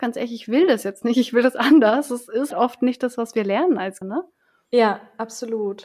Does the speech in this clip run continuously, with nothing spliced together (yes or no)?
no